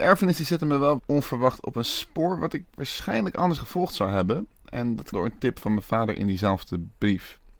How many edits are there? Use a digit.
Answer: 4